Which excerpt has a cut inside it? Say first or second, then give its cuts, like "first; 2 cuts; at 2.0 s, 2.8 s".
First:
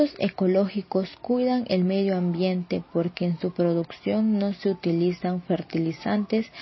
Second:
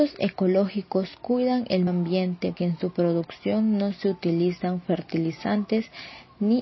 second; 2 cuts; at 1.9 s, 2.6 s